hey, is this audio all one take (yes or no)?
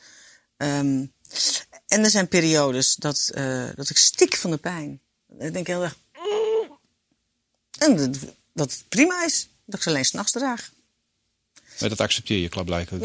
yes